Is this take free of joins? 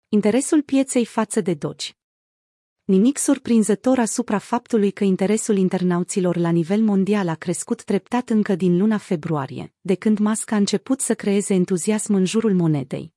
yes; 0 cuts

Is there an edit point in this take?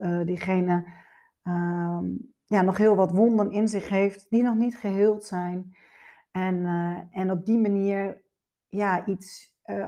no; 0 cuts

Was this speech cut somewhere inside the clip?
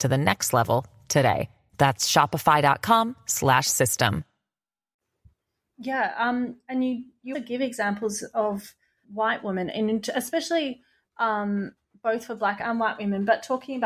yes; 2 cuts; at 7.3 s, 9.0 s

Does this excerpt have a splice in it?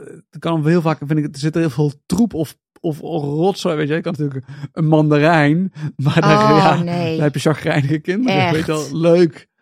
no; 0 cuts

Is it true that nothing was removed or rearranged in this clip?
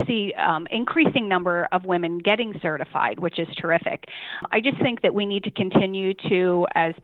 yes; 0 cuts

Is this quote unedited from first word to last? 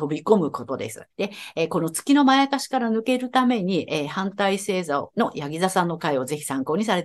no; 1 cut; at 1.1 s

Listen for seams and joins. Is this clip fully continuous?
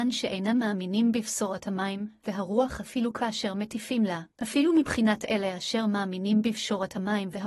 no; 1 cut; at 4.3 s

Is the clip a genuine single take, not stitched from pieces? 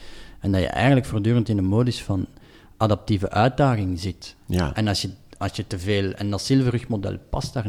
yes; 0 cuts

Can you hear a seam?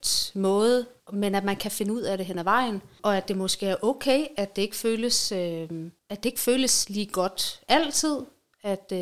no; 0 cuts

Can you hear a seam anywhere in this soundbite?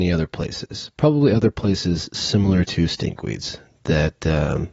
no; 0 cuts

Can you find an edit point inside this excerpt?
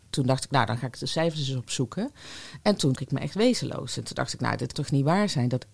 yes; 2 cuts; at 2.9 s, 4.7 s

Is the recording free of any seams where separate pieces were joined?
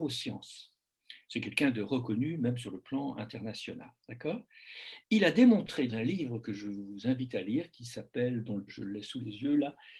no; 3 cuts; at 4.0 s, 5.9 s, 8.7 s

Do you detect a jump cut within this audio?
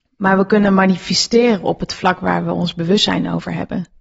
no; 0 cuts

